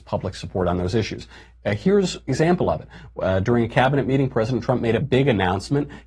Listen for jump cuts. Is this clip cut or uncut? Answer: cut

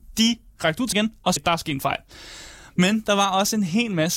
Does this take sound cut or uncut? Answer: cut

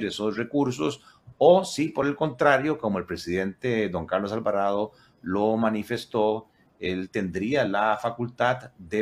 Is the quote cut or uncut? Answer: uncut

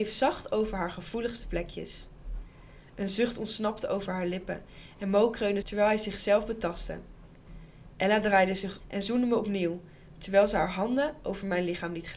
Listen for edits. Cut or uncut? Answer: cut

